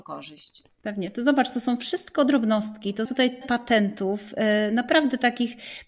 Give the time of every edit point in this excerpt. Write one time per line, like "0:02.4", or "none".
0:03.1
0:03.4